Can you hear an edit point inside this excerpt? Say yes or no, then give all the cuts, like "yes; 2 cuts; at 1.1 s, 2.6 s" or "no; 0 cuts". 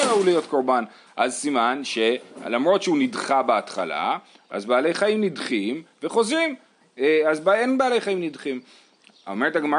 no; 0 cuts